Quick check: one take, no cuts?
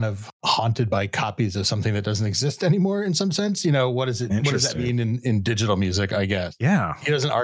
yes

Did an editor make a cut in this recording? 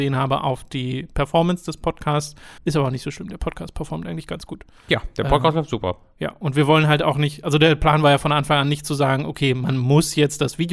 yes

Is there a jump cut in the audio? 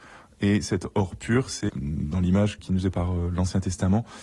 yes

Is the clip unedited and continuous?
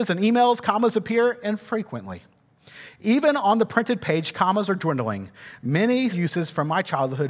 no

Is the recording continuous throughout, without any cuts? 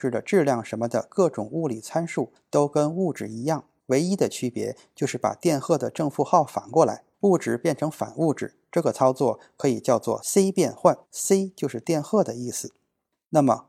no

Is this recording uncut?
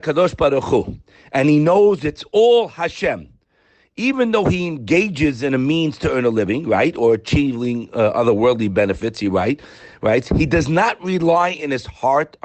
yes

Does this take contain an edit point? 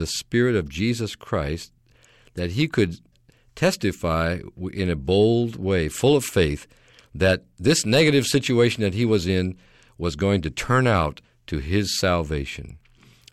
no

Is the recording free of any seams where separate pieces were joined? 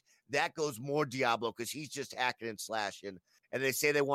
yes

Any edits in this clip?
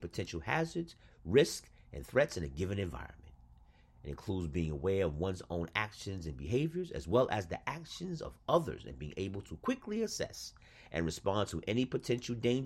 no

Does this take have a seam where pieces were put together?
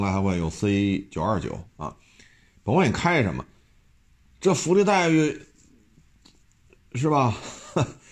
no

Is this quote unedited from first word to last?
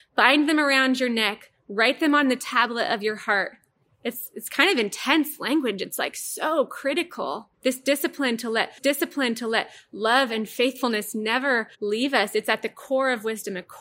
no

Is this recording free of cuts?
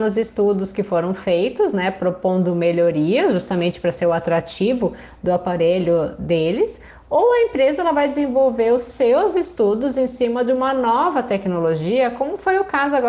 yes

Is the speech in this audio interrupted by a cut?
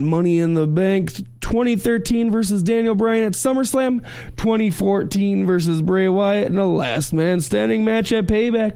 no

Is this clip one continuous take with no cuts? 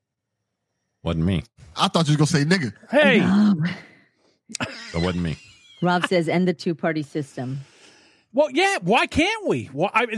yes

